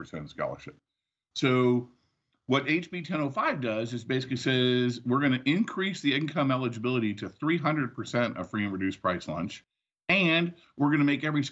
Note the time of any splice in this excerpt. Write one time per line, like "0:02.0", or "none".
none